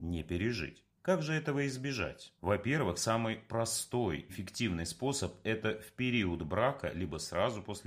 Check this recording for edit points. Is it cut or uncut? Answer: cut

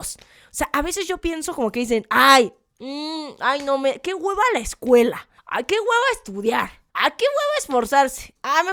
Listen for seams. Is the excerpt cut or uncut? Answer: cut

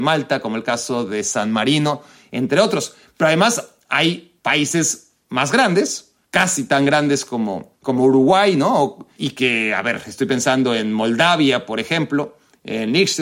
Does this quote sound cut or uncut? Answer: cut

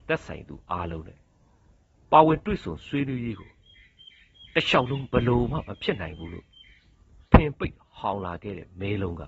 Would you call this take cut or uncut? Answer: uncut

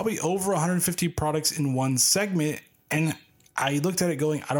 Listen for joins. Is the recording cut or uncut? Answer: uncut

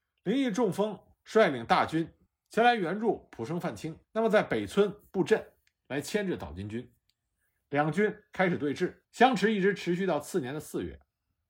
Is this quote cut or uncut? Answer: cut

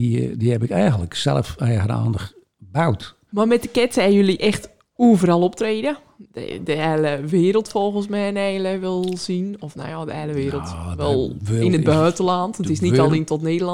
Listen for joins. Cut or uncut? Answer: uncut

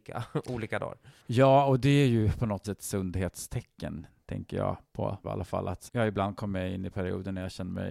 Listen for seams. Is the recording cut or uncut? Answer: cut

